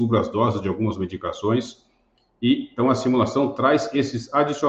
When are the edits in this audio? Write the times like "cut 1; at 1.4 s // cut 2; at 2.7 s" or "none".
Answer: none